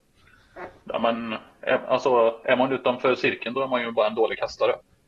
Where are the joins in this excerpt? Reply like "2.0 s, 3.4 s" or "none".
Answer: none